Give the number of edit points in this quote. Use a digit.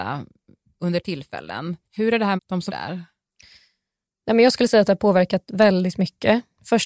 4